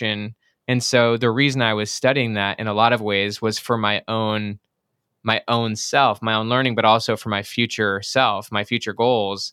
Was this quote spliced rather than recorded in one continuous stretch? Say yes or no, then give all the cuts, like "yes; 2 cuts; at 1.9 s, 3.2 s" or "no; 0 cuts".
no; 0 cuts